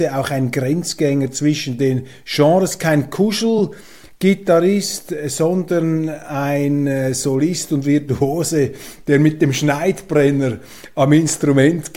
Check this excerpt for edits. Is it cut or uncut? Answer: uncut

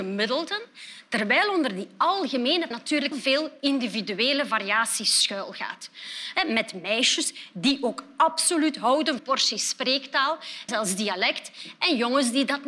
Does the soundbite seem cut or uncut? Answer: cut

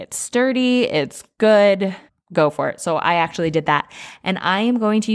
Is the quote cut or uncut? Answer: cut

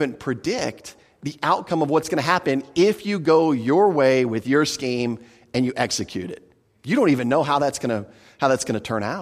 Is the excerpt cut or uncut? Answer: uncut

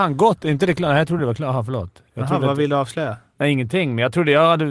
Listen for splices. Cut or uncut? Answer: uncut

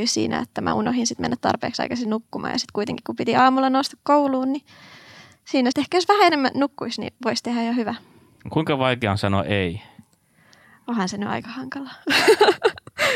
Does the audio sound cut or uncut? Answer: cut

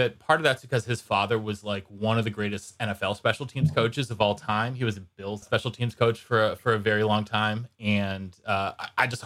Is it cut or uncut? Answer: cut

